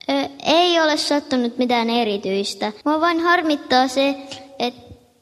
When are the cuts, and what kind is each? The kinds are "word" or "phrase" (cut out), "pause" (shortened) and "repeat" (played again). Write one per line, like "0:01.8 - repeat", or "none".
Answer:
0:02.8 - pause